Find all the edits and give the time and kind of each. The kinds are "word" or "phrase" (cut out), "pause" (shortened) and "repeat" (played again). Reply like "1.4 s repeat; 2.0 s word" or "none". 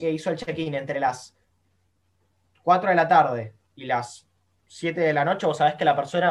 none